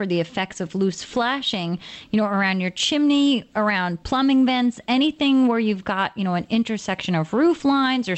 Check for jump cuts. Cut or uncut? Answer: uncut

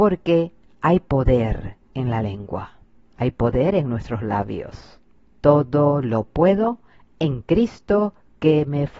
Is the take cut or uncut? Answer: uncut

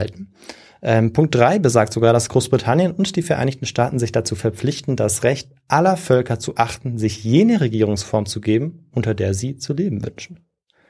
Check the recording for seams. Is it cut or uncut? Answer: uncut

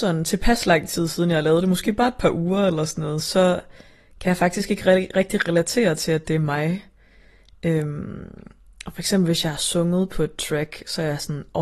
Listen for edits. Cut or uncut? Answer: uncut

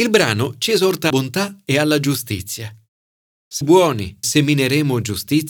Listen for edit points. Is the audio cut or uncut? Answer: cut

